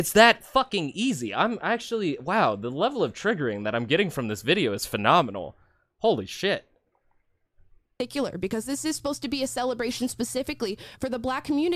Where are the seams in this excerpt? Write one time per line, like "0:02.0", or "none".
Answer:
none